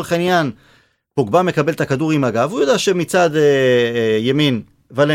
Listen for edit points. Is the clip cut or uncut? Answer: uncut